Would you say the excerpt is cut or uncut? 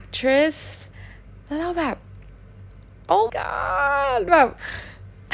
cut